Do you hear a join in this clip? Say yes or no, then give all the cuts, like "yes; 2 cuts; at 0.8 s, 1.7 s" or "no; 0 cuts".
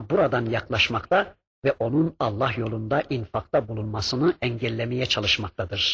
no; 0 cuts